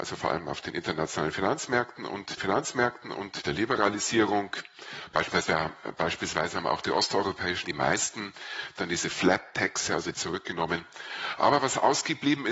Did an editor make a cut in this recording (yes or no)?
yes